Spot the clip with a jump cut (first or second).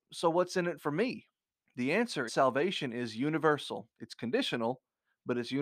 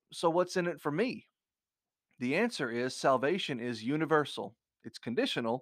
first